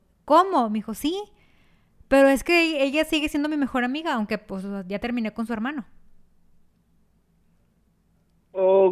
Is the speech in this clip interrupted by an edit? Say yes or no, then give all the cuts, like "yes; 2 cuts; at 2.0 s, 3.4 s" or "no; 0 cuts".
no; 0 cuts